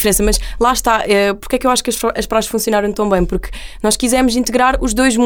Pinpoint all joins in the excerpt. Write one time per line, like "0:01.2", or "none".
none